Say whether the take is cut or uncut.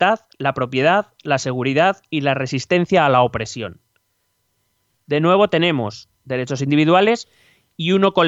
uncut